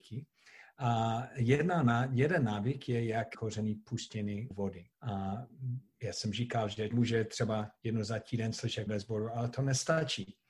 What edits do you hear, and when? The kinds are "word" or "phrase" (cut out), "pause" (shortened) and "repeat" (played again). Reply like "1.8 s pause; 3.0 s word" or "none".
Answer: 3.3 s phrase; 4.5 s word; 4.9 s pause; 6.9 s word; 8.9 s word